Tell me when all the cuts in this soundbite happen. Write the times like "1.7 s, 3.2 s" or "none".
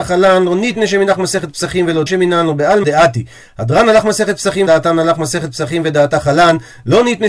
2.1 s, 2.8 s, 4.7 s